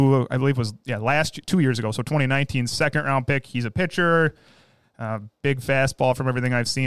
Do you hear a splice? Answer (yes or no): no